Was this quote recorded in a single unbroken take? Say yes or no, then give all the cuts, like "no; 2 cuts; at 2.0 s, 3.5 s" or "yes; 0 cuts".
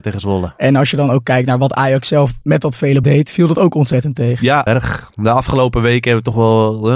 no; 3 cuts; at 2.4 s, 3.0 s, 4.7 s